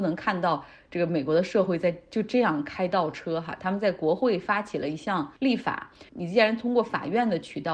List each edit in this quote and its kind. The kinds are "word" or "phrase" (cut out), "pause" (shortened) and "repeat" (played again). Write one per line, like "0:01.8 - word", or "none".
0:05.4 - pause